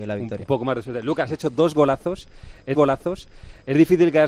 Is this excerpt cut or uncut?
cut